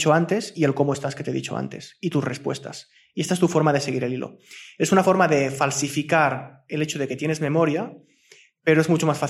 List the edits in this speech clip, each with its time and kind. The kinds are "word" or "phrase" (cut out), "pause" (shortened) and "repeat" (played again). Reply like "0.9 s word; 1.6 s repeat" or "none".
none